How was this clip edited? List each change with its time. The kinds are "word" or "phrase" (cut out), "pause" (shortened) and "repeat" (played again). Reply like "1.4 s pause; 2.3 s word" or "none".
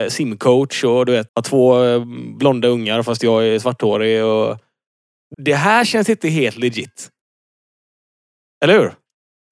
1.3 s word; 5.3 s phrase